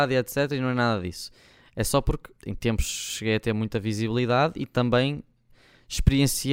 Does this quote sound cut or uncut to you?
cut